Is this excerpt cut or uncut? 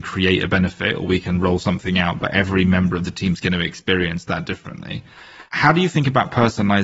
uncut